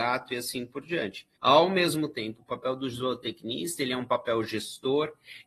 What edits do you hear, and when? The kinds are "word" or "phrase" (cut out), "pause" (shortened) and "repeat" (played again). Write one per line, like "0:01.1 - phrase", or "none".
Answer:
0:01.4 - pause

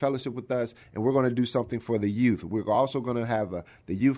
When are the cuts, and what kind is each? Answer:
none

